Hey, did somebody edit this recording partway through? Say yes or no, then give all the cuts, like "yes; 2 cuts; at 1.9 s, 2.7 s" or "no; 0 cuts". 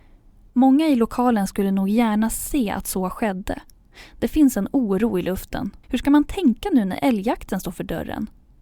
yes; 1 cut; at 5.8 s